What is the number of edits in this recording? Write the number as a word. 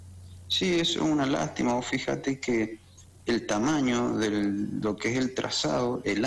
zero